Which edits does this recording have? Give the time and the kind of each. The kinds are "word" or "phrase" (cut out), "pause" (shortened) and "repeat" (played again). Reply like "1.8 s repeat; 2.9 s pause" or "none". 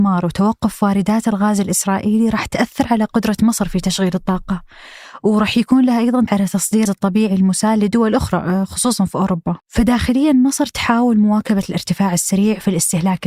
6.3 s word; 6.9 s word; 9.6 s pause